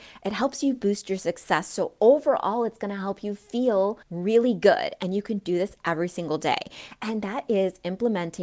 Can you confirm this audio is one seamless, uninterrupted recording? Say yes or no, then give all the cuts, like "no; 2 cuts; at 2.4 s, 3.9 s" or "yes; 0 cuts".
no; 1 cut; at 4.0 s